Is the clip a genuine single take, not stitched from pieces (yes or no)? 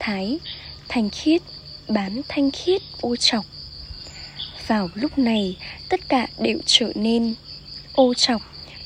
no